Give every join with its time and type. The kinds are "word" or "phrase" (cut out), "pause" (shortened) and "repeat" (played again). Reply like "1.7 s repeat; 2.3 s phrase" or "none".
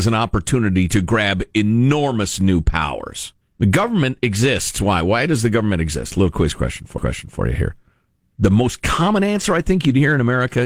3.4 s pause; 7.0 s repeat